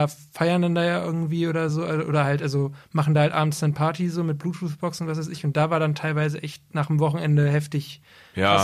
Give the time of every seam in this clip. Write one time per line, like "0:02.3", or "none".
none